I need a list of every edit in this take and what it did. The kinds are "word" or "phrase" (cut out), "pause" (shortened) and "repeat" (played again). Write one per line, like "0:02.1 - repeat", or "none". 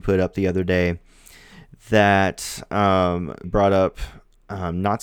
0:03.4 - word